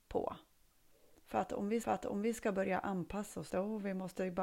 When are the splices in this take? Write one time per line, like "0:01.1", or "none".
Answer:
0:01.8
0:03.5